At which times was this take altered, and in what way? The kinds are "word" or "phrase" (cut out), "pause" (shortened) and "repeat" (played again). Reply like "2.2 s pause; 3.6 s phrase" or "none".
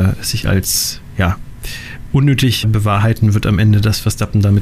2.6 s word